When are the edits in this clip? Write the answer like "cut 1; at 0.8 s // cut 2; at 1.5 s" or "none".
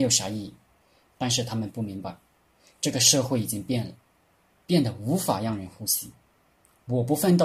none

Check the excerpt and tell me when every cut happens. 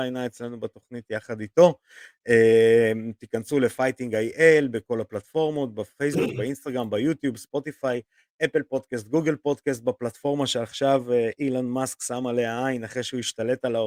none

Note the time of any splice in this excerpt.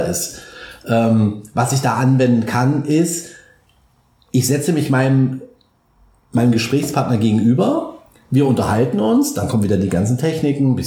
none

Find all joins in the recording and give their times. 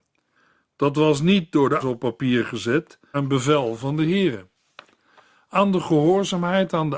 cut 1; at 1.8 s // cut 2; at 3.1 s

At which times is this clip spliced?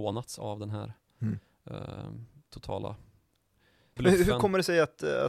cut 1; at 4.0 s

